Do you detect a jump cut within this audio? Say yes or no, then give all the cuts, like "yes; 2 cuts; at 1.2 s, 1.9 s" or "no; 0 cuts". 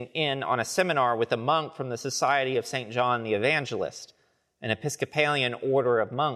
no; 0 cuts